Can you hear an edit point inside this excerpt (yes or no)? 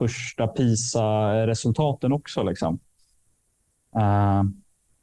no